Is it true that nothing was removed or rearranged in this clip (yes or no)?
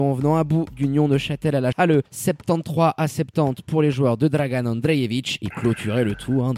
no